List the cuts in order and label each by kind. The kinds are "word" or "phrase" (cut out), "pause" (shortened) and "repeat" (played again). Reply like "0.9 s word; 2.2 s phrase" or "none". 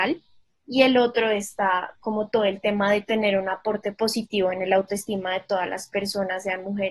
none